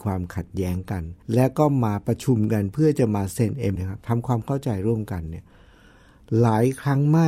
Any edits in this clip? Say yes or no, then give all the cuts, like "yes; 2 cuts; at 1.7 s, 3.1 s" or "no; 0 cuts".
yes; 2 cuts; at 1.2 s, 3.8 s